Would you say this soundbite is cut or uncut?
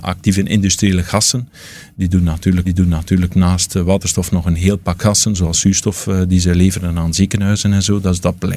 cut